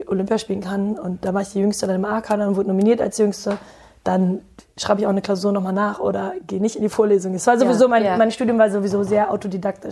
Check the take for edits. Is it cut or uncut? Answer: uncut